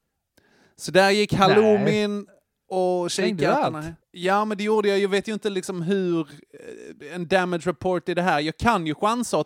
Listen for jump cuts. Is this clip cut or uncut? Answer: cut